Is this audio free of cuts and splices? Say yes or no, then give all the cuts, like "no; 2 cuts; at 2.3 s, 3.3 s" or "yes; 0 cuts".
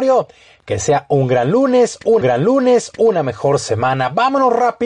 no; 1 cut; at 2.2 s